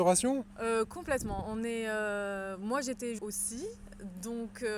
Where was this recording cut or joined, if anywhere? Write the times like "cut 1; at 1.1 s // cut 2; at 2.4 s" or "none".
cut 1; at 3.2 s